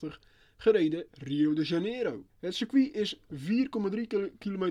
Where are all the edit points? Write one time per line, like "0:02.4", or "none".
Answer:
0:01.1
0:02.3